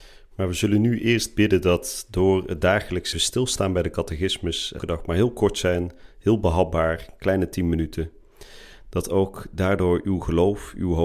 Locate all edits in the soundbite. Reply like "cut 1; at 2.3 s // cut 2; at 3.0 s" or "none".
cut 1; at 3.1 s // cut 2; at 4.8 s